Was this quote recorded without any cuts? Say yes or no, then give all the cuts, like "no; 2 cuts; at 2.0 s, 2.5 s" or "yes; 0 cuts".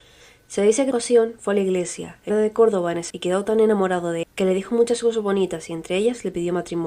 no; 4 cuts; at 0.9 s, 2.3 s, 3.1 s, 4.2 s